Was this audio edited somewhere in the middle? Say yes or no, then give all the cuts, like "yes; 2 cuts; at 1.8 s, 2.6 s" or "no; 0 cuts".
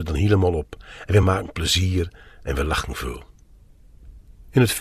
no; 0 cuts